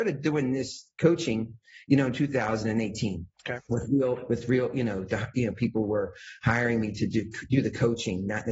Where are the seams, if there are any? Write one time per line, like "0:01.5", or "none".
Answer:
0:03.3